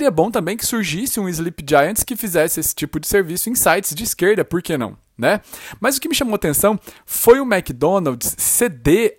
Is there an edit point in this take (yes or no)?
no